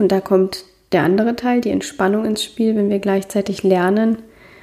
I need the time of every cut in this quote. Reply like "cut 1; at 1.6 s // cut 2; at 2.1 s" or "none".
none